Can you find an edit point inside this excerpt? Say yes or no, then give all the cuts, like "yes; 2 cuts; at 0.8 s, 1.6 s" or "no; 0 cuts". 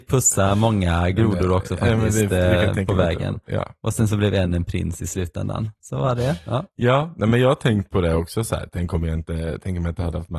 no; 0 cuts